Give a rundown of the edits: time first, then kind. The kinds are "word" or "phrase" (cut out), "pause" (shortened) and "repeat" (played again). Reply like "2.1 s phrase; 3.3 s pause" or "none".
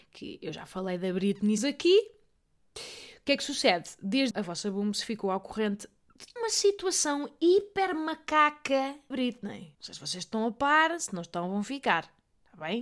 1.6 s word; 4.3 s word; 6.4 s word; 9.1 s phrase; 9.7 s pause